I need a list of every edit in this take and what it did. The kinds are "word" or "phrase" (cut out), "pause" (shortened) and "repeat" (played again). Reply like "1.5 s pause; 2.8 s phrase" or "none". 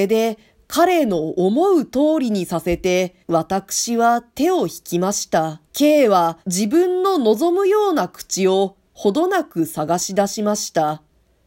3.2 s pause; 5.7 s pause; 6.4 s pause